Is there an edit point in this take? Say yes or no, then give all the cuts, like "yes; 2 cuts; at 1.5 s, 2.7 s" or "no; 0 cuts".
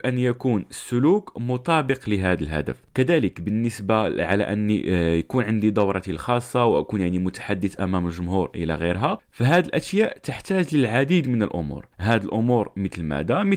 no; 0 cuts